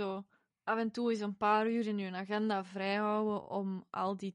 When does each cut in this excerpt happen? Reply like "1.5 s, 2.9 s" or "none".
none